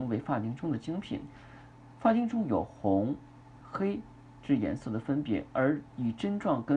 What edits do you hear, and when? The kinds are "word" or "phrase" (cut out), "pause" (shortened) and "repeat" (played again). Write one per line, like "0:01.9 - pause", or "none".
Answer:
0:03.6 - word